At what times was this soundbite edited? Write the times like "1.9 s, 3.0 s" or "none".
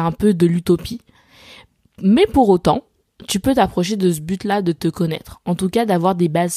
none